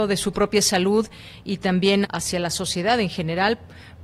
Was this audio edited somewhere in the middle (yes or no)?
yes